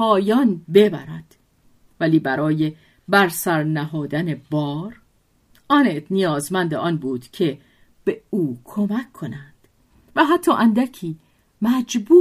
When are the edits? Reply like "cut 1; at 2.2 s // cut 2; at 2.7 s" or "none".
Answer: none